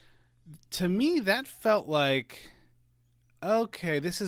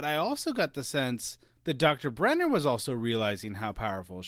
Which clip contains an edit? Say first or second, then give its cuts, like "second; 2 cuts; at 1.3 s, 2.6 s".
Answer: second; 1 cut; at 1.5 s